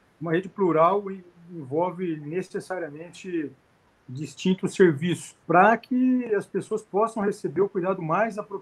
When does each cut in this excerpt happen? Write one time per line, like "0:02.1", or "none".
0:05.4